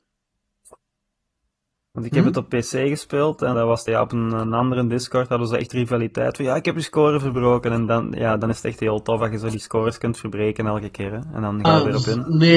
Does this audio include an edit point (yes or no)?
yes